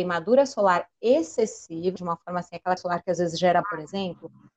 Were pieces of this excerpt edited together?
yes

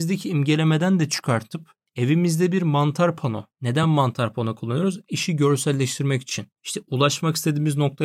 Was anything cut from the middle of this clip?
no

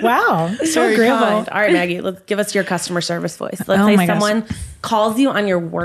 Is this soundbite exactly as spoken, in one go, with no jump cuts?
yes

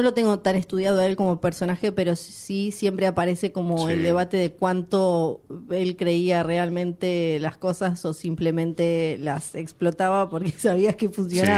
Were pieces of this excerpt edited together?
no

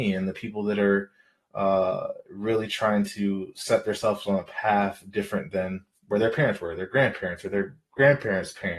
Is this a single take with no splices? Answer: yes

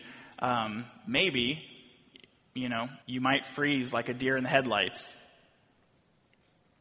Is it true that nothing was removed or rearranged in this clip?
no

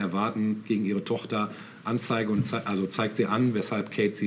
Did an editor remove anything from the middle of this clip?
no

